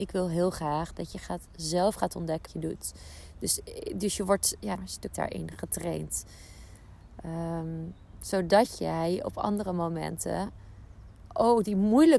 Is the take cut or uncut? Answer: cut